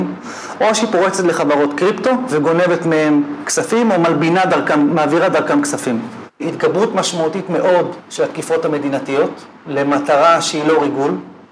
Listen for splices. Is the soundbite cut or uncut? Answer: cut